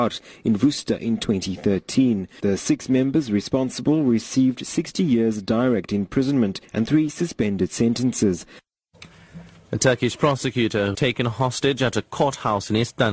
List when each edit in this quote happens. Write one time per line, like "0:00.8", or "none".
0:10.9